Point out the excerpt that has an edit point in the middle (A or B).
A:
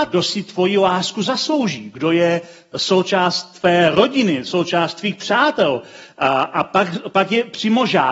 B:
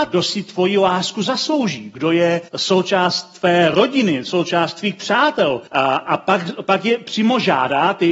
B